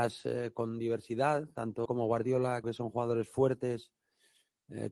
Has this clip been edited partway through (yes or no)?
yes